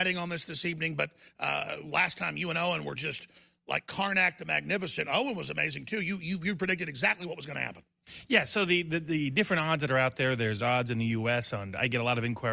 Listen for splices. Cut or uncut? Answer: uncut